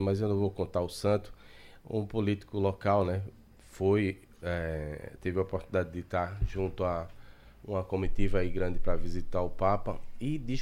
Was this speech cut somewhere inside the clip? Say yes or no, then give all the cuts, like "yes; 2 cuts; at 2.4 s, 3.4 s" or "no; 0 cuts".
no; 0 cuts